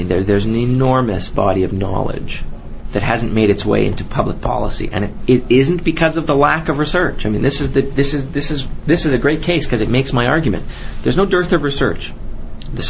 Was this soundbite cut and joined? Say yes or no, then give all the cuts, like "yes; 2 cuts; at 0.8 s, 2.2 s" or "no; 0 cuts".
no; 0 cuts